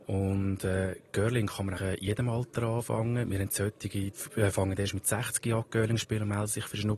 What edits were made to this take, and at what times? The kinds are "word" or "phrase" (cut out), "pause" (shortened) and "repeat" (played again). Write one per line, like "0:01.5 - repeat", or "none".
0:01.8 - word